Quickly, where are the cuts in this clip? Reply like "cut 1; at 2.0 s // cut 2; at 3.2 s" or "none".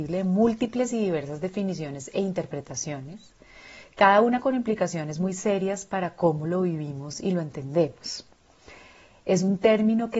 none

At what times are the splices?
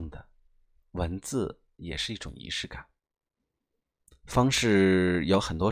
none

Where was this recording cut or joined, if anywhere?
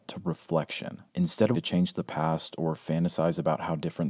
cut 1; at 1.1 s // cut 2; at 1.5 s

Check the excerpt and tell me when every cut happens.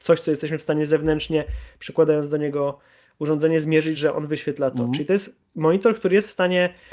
none

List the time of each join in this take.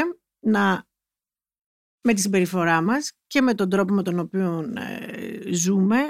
none

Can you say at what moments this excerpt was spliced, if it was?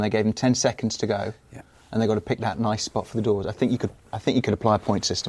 none

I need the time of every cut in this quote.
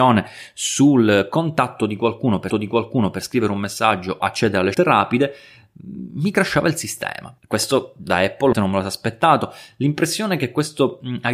cut 1; at 2.5 s // cut 2; at 4.2 s // cut 3; at 4.7 s // cut 4; at 7.4 s // cut 5; at 8.5 s

